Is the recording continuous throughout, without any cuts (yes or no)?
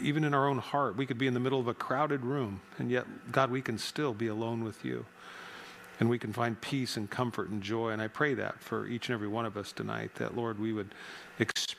yes